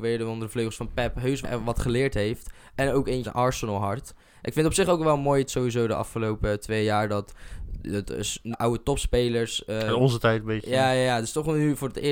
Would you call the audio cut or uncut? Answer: cut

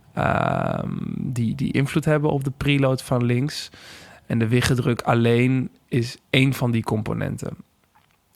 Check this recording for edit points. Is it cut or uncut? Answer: uncut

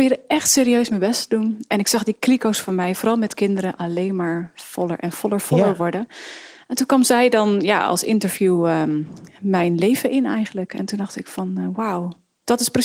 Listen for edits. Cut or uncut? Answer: uncut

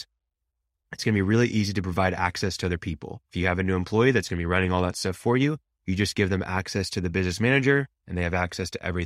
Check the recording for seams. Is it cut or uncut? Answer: cut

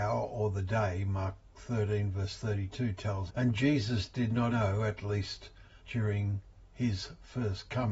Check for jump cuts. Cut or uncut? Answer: cut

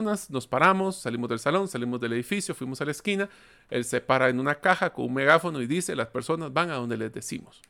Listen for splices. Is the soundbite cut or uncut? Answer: uncut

